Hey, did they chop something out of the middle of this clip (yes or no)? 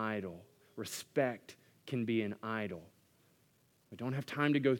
no